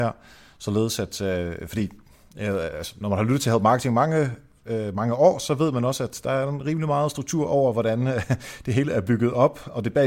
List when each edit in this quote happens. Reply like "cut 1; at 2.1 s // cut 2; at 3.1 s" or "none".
none